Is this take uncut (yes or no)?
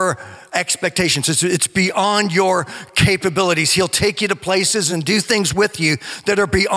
yes